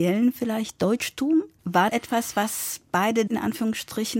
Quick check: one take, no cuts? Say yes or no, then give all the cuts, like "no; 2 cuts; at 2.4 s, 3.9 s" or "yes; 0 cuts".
no; 2 cuts; at 1.9 s, 3.3 s